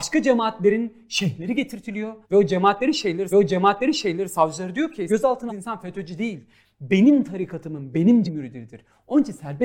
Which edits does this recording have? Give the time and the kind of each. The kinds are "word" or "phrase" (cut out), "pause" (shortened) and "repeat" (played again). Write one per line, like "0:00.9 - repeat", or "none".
0:02.2 - pause
0:03.3 - repeat
0:05.1 - word
0:05.5 - word
0:08.3 - word